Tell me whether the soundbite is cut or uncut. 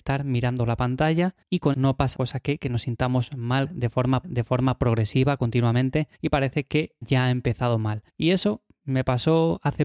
cut